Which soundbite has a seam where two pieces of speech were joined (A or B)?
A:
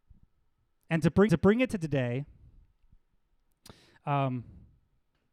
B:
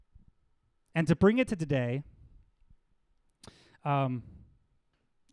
A